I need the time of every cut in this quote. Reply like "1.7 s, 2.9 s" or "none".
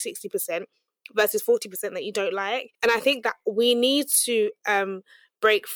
2.7 s